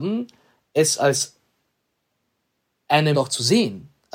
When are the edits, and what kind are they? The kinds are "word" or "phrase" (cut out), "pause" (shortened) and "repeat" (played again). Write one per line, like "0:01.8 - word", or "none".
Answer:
0:03.1 - word